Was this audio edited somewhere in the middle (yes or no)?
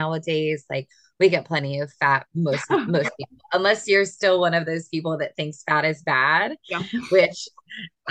no